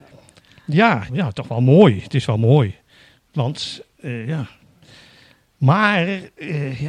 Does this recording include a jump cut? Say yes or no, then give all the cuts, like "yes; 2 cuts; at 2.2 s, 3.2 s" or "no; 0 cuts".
yes; 1 cut; at 1.1 s